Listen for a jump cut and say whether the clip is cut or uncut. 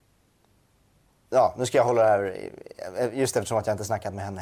uncut